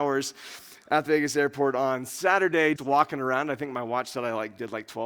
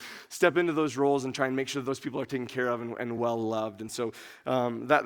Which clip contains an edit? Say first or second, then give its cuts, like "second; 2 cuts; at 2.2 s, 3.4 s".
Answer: first; 2 cuts; at 1.1 s, 2.8 s